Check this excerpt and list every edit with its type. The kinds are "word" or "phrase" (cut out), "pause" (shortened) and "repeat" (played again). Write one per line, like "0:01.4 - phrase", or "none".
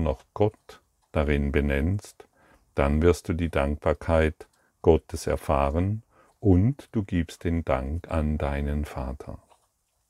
none